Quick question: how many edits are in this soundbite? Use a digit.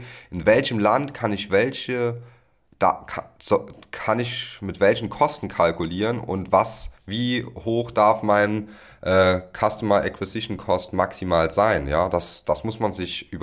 0